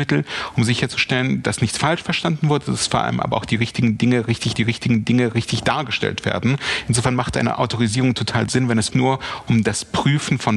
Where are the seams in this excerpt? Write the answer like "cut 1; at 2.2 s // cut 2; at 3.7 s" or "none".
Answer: cut 1; at 4.6 s // cut 2; at 8.9 s